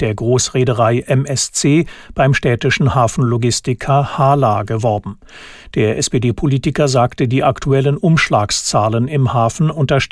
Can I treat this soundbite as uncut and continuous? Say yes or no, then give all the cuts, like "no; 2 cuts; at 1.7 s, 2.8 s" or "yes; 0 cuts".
yes; 0 cuts